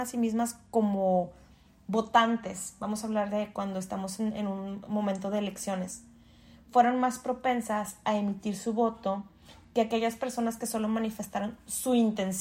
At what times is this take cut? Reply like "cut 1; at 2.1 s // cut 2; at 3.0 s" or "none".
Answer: none